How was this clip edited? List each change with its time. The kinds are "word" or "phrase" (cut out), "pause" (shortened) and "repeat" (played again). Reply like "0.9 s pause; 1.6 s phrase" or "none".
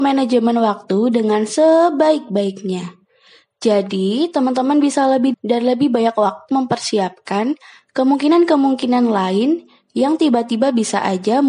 5.3 s word; 6.5 s word